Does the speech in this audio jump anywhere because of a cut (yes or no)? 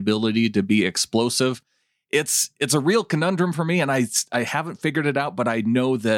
no